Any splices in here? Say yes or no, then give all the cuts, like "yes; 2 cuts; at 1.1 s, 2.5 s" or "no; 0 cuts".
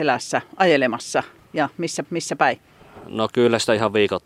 yes; 1 cut; at 2.0 s